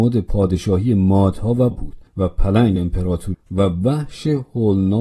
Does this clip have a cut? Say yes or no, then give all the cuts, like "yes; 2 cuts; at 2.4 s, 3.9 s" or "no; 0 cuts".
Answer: yes; 4 cuts; at 1.7 s, 2.1 s, 2.8 s, 3.3 s